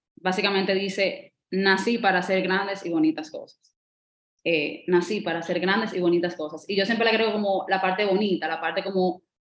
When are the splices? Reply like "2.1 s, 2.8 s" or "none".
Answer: none